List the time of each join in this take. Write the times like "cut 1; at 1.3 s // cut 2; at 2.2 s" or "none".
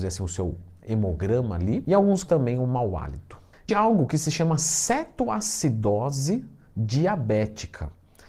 cut 1; at 2.3 s // cut 2; at 3.7 s